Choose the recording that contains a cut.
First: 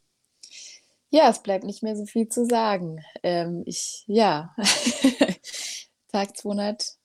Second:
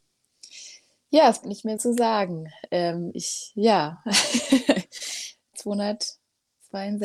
second; 3 cuts; at 1.4 s, 1.8 s, 5.5 s

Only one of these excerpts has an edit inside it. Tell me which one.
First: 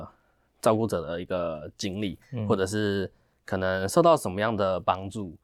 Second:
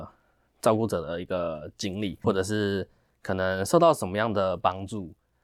second; 1 cut; at 2.2 s

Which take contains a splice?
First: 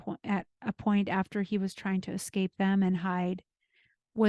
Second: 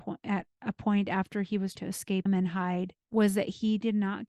second; 3 cuts; at 1.8 s, 2.3 s, 3.0 s

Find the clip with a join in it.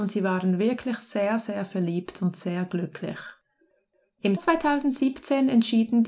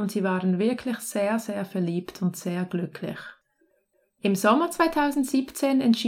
first; 1 cut; at 4.4 s

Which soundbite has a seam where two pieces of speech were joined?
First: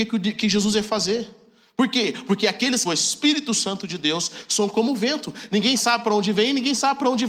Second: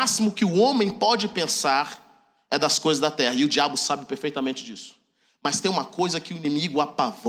first; 1 cut; at 2.8 s

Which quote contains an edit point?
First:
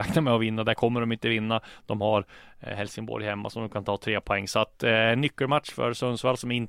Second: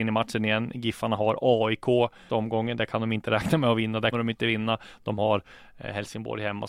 second; 2 cuts; at 2.3 s, 4.1 s

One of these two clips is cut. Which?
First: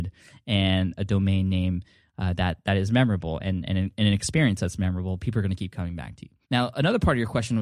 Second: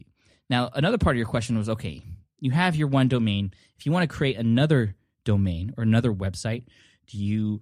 first; 1 cut; at 6.4 s

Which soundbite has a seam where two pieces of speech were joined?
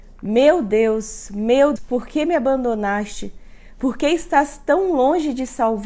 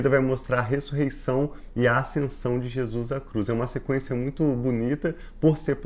first; 1 cut; at 1.8 s

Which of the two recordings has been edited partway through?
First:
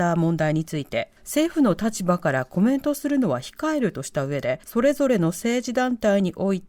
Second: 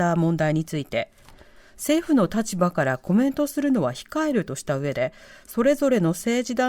first; 2 cuts; at 1.2 s, 4.6 s

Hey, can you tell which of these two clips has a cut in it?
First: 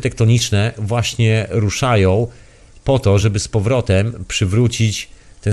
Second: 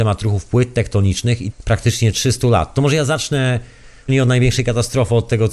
second; 2 cuts; at 1.5 s, 4.1 s

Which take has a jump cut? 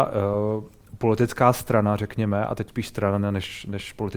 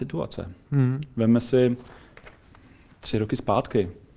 first; 1 cut; at 2.7 s

